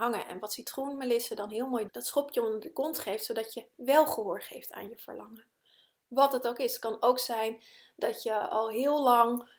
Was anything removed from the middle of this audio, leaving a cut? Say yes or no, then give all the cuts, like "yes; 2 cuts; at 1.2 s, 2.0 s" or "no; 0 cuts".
yes; 1 cut; at 1.9 s